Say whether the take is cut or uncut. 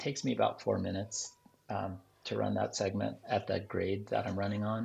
uncut